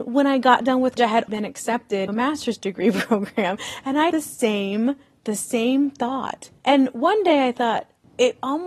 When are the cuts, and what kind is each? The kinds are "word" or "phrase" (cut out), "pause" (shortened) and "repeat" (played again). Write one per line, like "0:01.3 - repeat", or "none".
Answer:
0:01.0 - word
0:01.3 - word
0:02.1 - word
0:04.1 - word
0:05.2 - word
0:06.6 - pause